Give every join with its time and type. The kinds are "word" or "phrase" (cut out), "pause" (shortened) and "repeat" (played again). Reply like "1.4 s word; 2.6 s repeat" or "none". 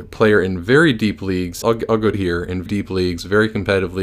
1.6 s word; 2.1 s word; 2.7 s word